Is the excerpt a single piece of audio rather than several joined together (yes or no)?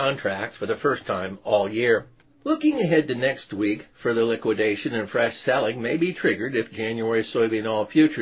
yes